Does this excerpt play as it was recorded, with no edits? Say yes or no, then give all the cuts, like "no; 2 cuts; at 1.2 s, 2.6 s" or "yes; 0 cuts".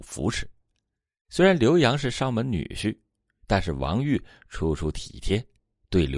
yes; 0 cuts